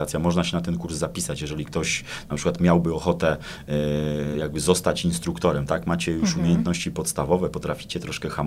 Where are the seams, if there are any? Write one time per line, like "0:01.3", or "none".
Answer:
none